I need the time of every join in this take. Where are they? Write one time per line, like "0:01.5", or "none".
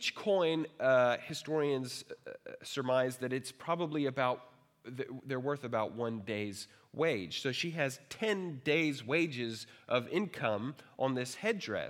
none